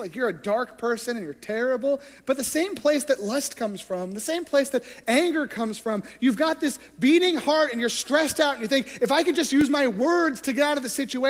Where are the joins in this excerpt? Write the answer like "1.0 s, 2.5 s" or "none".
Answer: none